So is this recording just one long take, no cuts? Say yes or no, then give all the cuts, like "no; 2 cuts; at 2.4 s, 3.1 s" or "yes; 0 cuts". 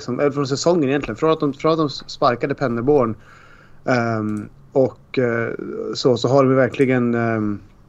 yes; 0 cuts